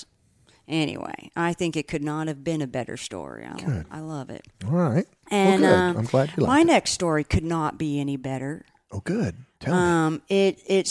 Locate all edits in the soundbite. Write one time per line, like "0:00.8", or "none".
none